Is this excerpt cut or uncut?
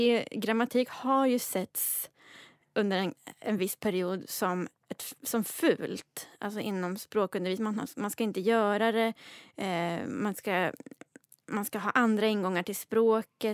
uncut